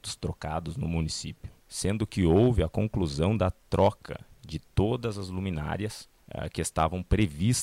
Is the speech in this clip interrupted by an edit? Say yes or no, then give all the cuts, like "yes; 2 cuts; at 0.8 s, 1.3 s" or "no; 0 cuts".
yes; 2 cuts; at 1.6 s, 6.2 s